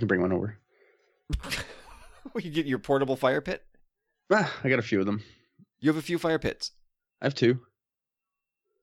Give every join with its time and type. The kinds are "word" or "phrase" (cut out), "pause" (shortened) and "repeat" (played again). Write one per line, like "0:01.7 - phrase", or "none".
none